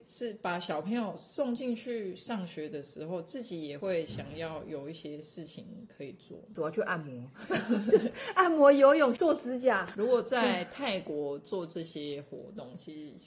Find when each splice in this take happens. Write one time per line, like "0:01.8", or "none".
0:09.2

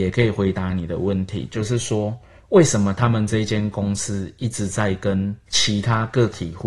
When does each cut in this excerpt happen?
0:05.5

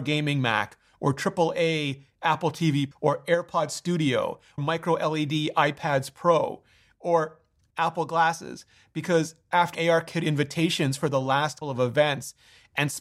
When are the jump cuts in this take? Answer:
0:02.9
0:04.6
0:07.7
0:09.7
0:11.6

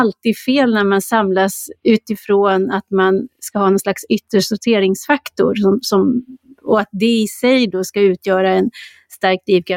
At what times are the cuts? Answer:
none

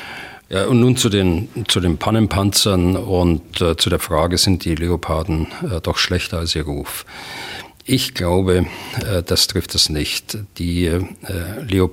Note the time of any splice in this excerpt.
none

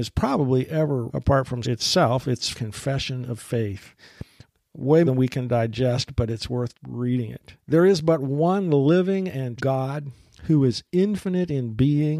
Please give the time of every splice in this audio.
0:01.1
0:01.6
0:02.5
0:05.1
0:06.7
0:07.6
0:09.6

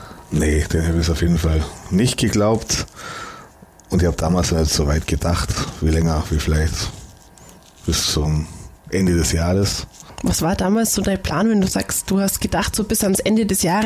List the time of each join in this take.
none

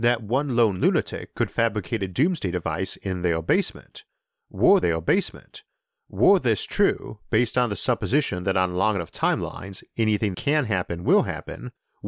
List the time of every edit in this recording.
0:04.8
0:10.3

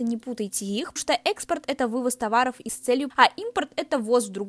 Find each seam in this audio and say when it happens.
0:01.0
0:02.7
0:03.1

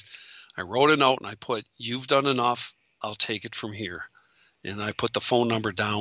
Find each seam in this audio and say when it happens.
none

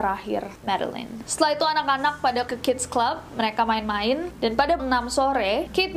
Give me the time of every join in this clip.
0:02.5
0:04.8

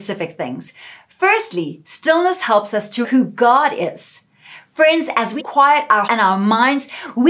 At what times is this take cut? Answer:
0:03.0
0:05.4
0:06.1

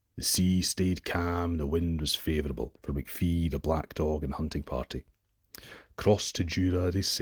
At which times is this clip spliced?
0:02.8

